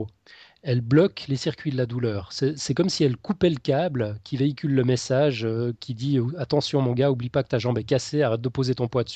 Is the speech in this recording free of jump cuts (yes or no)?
yes